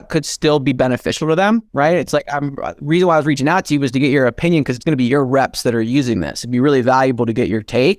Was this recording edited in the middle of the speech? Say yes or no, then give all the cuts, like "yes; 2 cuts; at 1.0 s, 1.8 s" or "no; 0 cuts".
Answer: yes; 1 cut; at 1.7 s